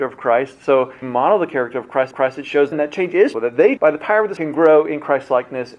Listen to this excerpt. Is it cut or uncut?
cut